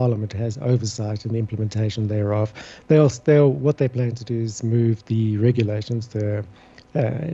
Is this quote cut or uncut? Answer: uncut